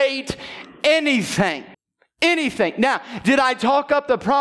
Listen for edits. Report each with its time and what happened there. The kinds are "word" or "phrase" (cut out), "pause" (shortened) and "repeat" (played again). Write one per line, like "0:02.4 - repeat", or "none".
0:01.7 - pause